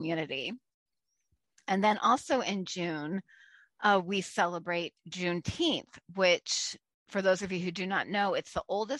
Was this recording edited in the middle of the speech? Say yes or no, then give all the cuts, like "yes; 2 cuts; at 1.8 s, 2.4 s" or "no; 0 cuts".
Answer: no; 0 cuts